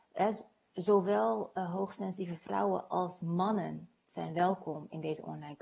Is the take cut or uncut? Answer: uncut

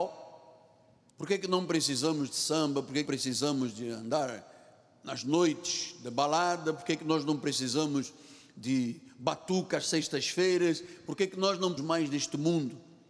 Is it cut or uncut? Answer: cut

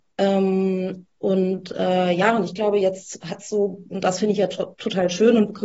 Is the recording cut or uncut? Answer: uncut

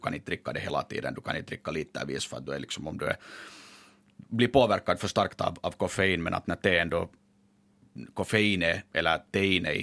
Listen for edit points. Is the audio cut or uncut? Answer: uncut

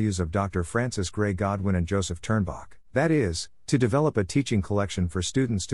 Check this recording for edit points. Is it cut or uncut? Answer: cut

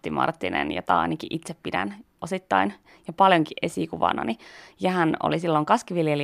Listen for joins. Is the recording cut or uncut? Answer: uncut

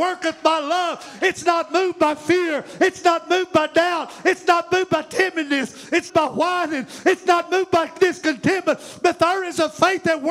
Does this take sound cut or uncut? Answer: cut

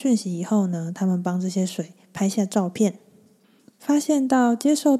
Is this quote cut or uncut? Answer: uncut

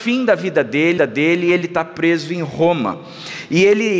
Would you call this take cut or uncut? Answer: cut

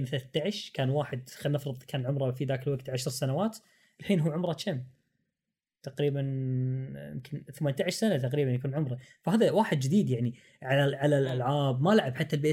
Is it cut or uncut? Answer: uncut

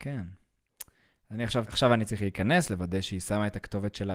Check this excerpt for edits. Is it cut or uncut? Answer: cut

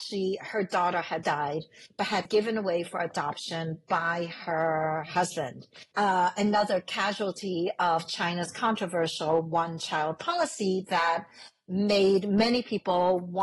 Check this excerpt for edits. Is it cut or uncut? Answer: cut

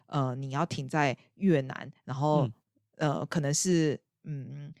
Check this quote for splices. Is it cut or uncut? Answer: uncut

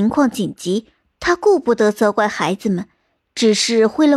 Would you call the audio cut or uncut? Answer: uncut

